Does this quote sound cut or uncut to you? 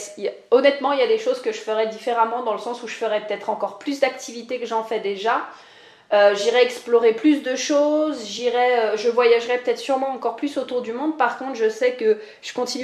uncut